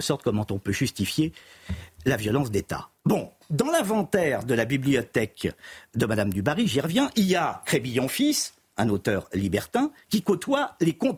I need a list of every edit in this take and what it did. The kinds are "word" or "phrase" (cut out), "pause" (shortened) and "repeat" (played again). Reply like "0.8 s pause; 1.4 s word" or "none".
3.0 s pause